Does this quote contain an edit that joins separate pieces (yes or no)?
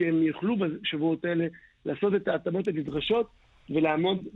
no